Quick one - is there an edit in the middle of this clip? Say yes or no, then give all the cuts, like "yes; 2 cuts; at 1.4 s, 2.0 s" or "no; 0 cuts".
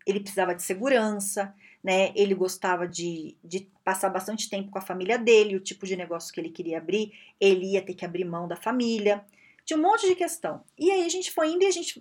no; 0 cuts